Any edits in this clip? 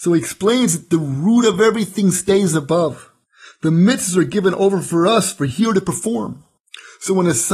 no; 0 cuts

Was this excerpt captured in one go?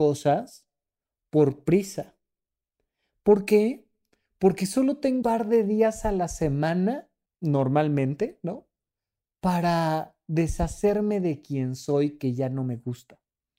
no; 2 cuts; at 5.2 s, 7.3 s

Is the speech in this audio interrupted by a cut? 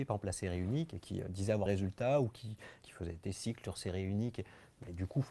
yes; 2 cuts; at 1.7 s, 2.8 s

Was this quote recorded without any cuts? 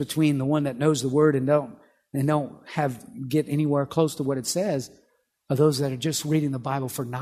yes; 0 cuts

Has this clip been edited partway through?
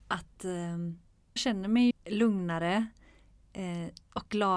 yes; 2 cuts; at 1.4 s, 1.9 s

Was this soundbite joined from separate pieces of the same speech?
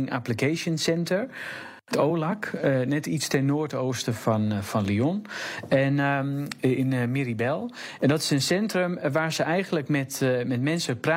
no; 0 cuts

